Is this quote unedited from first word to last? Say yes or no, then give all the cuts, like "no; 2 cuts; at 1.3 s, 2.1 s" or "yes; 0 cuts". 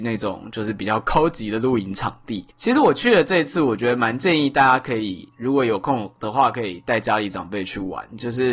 no; 1 cut; at 2.5 s